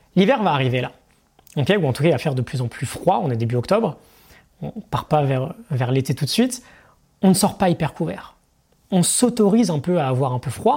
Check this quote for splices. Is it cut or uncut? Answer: uncut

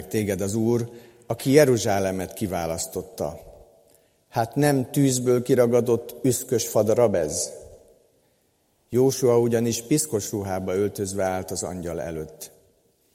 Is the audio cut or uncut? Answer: uncut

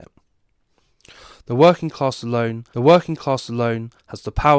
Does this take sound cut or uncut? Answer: cut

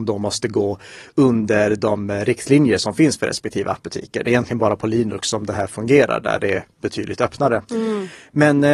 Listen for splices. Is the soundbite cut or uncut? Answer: uncut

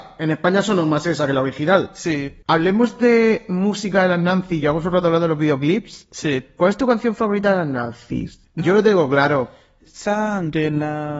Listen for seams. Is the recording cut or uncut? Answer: uncut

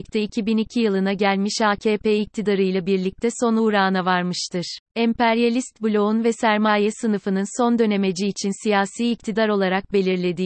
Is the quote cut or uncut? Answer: cut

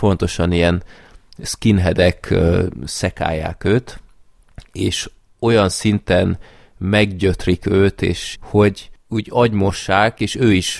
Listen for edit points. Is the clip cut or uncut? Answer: cut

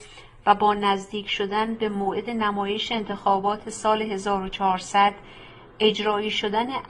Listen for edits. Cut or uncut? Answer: uncut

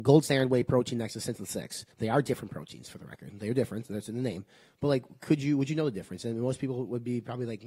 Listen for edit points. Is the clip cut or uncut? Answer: cut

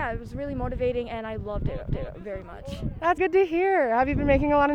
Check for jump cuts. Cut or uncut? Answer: cut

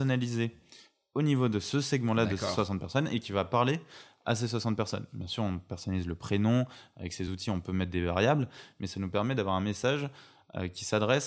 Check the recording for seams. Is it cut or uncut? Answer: uncut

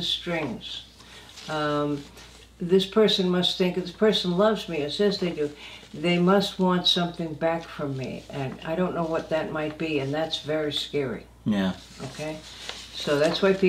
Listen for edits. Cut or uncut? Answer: uncut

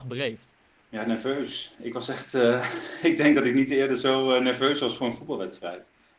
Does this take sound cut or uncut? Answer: uncut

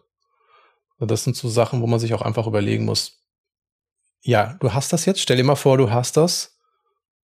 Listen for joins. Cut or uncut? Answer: uncut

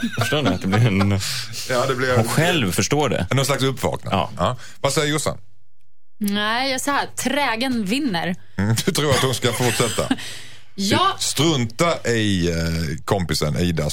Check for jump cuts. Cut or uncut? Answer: cut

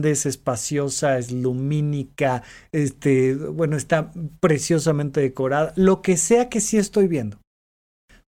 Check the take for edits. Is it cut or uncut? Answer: uncut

